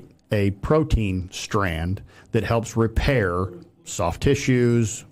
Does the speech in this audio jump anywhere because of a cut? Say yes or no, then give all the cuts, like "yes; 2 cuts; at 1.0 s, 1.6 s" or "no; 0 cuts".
no; 0 cuts